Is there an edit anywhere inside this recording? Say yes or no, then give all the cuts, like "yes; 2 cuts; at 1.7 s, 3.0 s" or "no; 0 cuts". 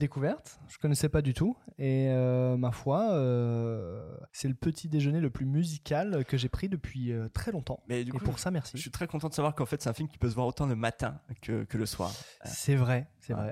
yes; 1 cut; at 4.3 s